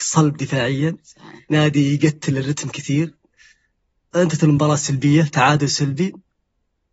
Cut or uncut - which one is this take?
uncut